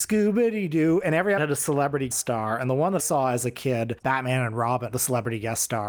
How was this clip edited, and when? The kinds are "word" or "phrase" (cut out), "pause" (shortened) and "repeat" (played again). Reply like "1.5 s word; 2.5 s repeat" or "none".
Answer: 1.4 s word; 2.1 s word; 3.0 s word; 4.0 s word; 4.9 s word